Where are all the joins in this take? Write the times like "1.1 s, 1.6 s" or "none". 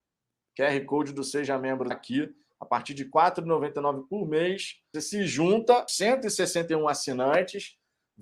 1.9 s, 4.9 s, 5.9 s